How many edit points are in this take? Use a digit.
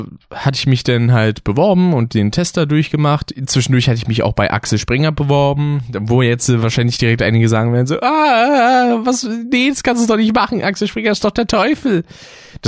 0